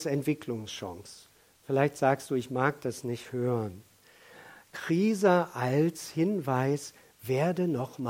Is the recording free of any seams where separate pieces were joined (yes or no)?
yes